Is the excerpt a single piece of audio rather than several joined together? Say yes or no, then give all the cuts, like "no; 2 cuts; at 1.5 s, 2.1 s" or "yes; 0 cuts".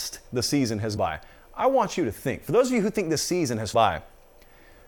no; 2 cuts; at 1.0 s, 3.7 s